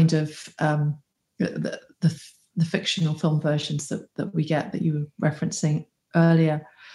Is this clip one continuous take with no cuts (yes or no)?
yes